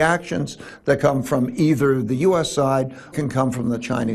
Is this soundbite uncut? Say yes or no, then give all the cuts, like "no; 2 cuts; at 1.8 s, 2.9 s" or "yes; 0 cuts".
no; 2 cuts; at 1.0 s, 3.1 s